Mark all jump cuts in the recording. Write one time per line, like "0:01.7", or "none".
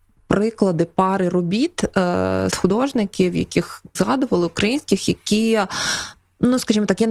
0:02.5
0:03.9